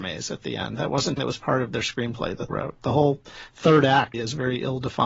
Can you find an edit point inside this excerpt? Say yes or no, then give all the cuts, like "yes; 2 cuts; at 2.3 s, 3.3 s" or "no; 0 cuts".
yes; 3 cuts; at 1.2 s, 2.5 s, 4.1 s